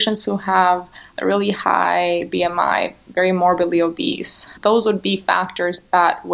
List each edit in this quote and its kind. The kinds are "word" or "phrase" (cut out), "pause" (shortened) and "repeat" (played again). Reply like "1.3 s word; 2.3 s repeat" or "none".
none